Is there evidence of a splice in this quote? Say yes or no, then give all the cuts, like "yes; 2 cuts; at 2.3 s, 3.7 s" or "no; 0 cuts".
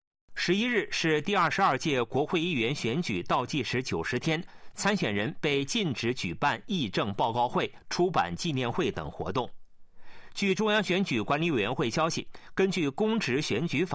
yes; 1 cut; at 4.7 s